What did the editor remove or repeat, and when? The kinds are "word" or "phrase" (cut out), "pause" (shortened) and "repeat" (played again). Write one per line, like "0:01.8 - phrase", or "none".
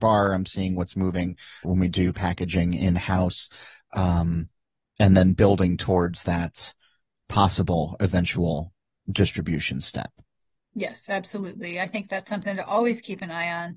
0:01.6 - word